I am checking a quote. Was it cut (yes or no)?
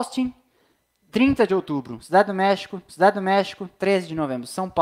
yes